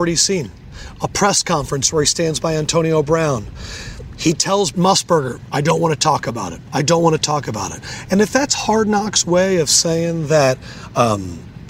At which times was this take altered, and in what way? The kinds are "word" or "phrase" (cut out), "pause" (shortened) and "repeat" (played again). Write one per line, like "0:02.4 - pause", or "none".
0:04.7 - word